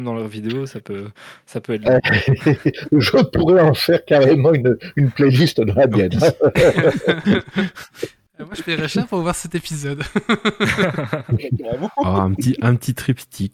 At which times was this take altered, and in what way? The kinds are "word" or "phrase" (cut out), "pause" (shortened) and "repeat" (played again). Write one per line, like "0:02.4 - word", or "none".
none